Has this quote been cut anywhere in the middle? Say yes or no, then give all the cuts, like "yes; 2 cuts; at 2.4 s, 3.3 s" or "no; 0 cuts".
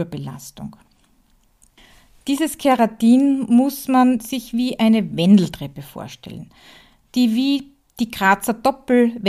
no; 0 cuts